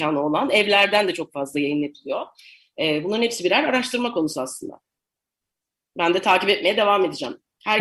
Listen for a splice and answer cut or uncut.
uncut